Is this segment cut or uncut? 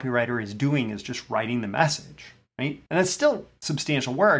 cut